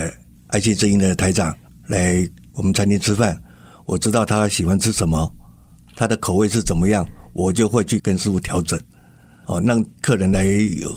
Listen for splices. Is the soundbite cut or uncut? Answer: uncut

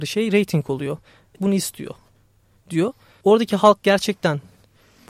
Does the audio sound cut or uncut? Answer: cut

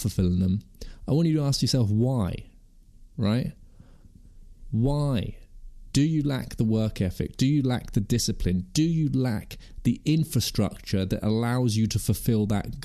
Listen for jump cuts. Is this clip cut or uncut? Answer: uncut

